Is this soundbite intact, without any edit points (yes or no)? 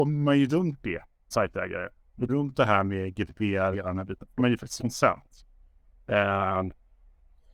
no